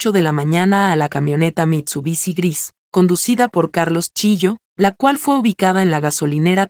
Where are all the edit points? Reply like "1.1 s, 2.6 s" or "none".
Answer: 2.8 s, 4.6 s